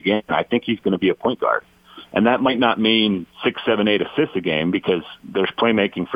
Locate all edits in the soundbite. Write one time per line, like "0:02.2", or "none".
0:03.3